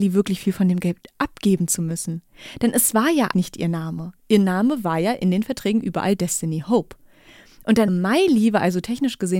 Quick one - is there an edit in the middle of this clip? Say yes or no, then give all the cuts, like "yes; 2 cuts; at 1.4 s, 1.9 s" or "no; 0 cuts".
yes; 2 cuts; at 3.3 s, 7.9 s